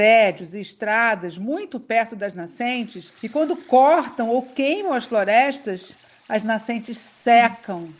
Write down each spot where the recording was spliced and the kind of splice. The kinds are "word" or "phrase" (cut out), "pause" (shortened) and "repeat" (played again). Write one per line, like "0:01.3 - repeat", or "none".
0:03.2 - pause